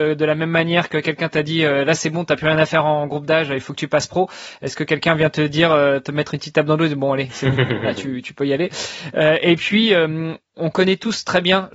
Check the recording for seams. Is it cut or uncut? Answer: uncut